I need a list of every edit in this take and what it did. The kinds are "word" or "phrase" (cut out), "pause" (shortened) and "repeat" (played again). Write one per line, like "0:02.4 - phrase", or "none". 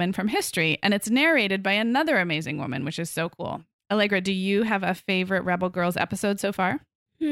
none